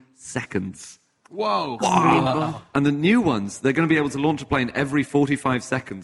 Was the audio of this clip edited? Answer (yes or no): no